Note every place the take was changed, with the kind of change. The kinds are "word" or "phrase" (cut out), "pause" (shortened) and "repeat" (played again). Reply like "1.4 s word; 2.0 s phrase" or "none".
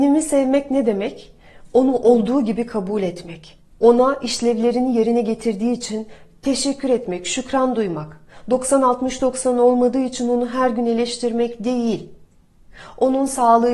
none